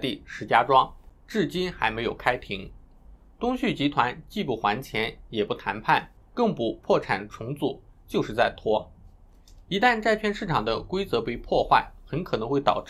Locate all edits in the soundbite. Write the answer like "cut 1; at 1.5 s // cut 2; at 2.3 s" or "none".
none